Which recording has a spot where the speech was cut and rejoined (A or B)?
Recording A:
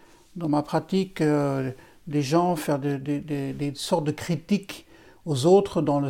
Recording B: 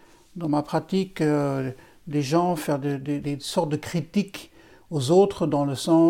B